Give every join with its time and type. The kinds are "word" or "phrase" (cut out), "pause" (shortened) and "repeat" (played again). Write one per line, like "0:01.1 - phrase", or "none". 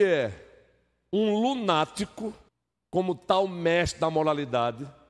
0:02.5 - pause